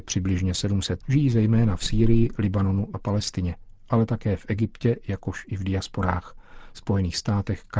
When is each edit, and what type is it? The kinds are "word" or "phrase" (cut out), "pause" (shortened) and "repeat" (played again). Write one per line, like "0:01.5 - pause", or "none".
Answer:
0:01.0 - word
0:02.9 - word